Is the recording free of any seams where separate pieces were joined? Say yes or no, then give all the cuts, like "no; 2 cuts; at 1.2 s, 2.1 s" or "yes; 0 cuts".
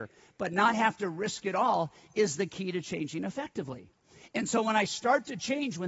yes; 0 cuts